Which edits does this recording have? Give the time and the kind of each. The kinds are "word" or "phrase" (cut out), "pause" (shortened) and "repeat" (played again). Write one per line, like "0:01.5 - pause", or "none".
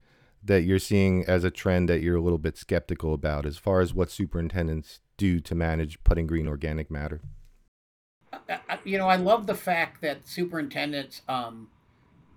none